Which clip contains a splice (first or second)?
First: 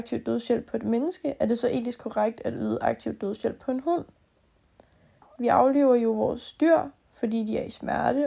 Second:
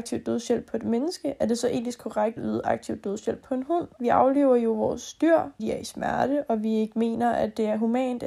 second